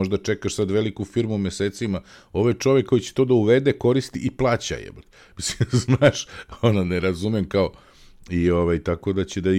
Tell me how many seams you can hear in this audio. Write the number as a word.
zero